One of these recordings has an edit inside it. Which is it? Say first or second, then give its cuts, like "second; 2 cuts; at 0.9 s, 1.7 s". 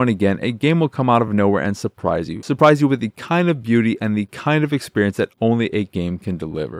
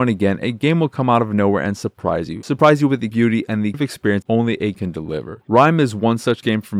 second; 4 cuts; at 3.1 s, 3.7 s, 4.2 s, 4.7 s